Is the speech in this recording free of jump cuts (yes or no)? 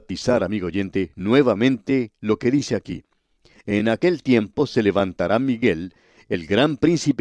yes